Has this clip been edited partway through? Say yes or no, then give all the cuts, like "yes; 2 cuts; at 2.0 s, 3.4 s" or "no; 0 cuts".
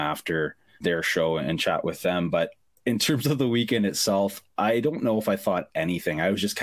no; 0 cuts